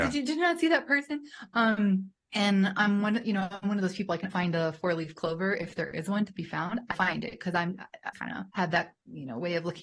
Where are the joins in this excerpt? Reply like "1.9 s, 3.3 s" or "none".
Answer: 2.2 s, 4.3 s, 6.9 s, 8.1 s, 8.5 s